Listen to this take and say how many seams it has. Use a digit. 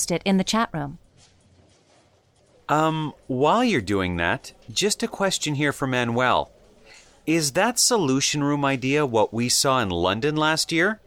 0